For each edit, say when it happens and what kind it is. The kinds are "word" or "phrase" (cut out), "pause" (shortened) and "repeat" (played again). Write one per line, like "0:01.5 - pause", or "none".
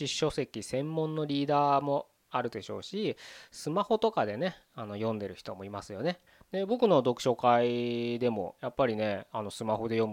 0:06.3 - pause